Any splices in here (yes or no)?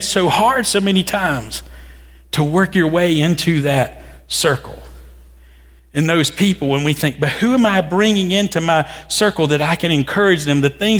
no